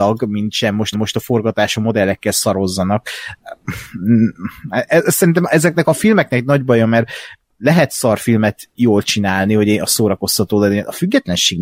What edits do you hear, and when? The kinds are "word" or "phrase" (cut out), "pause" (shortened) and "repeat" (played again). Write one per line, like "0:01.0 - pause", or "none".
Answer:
0:00.9 - repeat